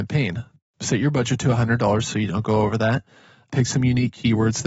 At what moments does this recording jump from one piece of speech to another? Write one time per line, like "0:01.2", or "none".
none